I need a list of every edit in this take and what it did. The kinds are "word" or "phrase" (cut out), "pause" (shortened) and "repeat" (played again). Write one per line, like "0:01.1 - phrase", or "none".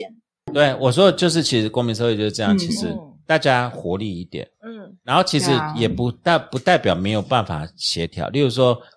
none